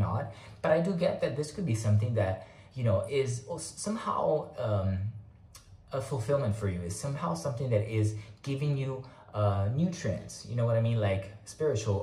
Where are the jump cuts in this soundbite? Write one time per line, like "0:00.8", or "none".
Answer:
0:01.7
0:03.1